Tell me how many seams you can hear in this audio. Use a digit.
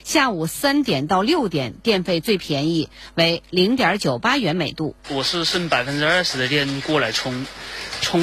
1